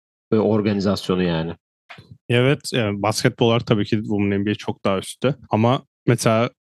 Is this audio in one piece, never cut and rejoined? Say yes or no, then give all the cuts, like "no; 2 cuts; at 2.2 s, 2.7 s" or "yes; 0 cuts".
no; 1 cut; at 5.4 s